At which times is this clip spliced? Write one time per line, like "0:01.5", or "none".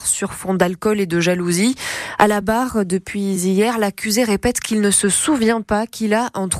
none